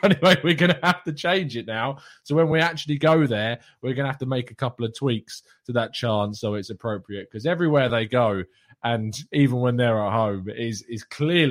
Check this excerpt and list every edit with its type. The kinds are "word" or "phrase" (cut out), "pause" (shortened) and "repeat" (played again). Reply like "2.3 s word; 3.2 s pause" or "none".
none